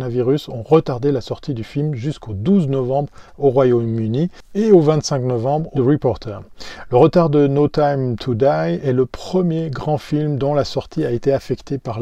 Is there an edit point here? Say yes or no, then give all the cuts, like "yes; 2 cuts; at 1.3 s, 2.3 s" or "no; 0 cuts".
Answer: yes; 1 cut; at 5.8 s